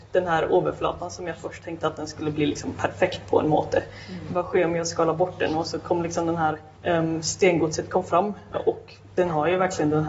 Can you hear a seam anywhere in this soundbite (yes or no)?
yes